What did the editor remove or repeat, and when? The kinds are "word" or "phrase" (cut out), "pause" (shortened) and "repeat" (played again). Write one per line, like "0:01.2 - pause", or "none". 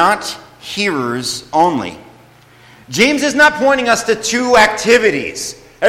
none